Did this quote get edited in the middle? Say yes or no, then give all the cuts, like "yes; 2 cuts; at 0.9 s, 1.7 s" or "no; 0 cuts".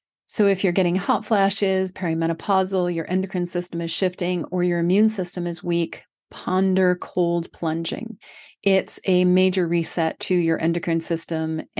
no; 0 cuts